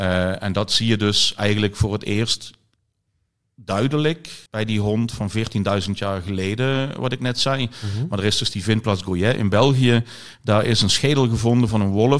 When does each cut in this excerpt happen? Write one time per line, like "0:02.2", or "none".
0:04.5